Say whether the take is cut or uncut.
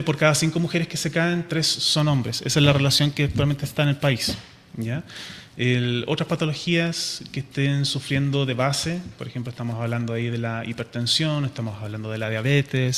uncut